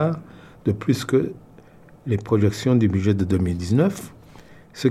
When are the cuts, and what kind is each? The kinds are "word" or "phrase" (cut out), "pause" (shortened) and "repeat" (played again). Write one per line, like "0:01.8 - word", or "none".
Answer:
none